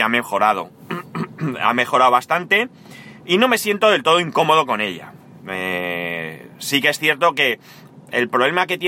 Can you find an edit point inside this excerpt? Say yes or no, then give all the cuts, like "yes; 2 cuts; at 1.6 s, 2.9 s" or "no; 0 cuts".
no; 0 cuts